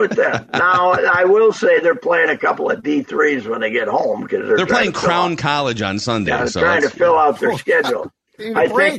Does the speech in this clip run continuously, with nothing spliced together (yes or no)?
yes